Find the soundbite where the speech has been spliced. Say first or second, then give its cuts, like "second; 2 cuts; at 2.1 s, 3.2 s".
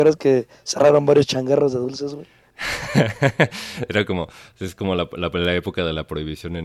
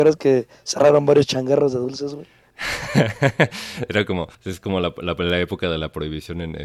second; 1 cut; at 4.3 s